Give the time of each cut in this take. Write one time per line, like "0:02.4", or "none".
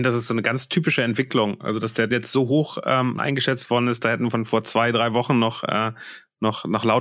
0:02.1
0:03.2